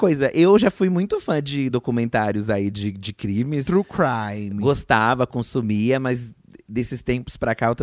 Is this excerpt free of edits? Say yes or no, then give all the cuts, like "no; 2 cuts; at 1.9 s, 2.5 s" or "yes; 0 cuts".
yes; 0 cuts